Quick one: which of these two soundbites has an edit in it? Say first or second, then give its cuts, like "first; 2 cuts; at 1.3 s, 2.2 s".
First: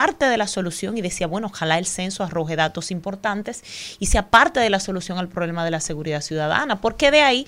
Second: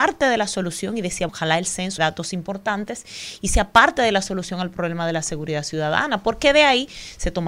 second; 2 cuts; at 1.3 s, 2.0 s